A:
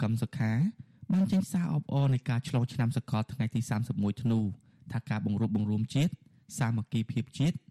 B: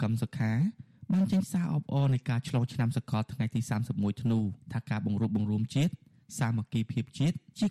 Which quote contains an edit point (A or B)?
B